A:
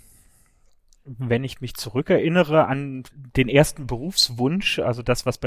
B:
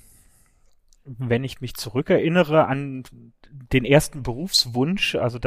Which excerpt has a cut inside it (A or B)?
A